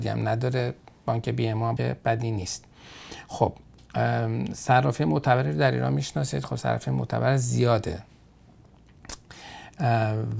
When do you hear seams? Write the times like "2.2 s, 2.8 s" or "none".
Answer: 1.8 s